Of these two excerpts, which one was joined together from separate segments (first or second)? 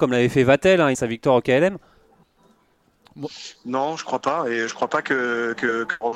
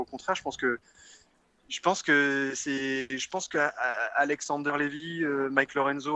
first